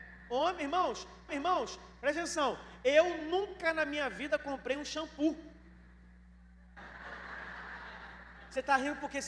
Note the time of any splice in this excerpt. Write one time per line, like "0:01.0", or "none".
0:01.3